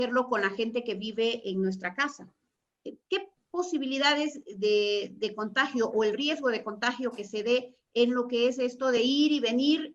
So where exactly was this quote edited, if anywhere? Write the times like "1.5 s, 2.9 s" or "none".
none